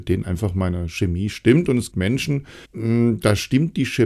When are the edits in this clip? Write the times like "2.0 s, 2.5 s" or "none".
1.9 s, 2.6 s